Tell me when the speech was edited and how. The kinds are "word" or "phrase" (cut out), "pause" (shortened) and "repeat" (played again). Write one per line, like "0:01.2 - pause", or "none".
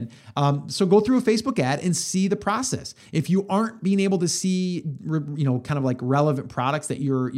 none

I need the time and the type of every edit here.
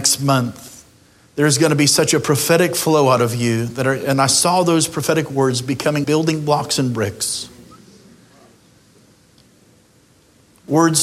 0:06.0 - word

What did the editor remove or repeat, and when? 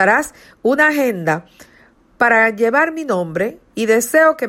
none

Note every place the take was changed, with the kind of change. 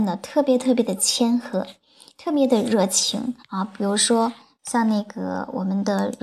0:03.4 - pause

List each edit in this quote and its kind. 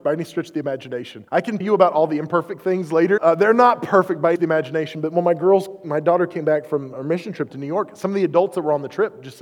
0:01.3 - pause
0:01.6 - word
0:03.2 - phrase
0:04.4 - phrase

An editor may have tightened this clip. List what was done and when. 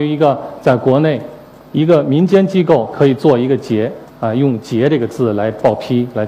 0:04.1 - pause

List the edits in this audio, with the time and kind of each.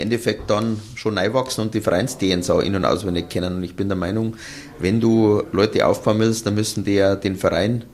none

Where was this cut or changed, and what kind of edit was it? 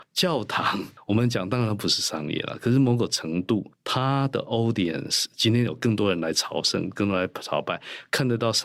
none

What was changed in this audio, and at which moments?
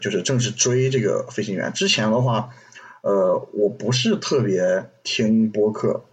none

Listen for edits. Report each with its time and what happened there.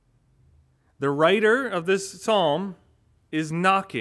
none

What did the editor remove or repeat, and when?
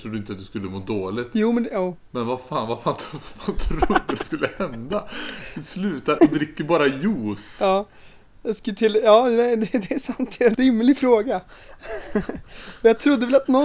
0:06.2 - word
0:10.5 - word

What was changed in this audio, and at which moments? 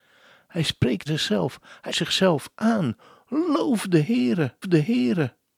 0:01.1 - word
0:01.9 - word
0:04.6 - repeat

